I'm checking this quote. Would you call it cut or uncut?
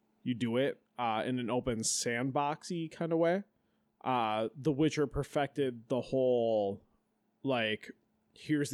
uncut